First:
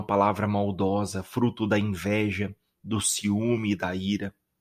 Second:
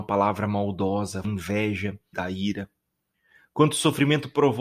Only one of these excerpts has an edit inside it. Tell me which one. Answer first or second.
second